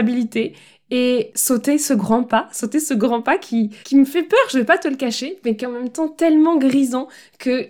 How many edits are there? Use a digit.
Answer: 1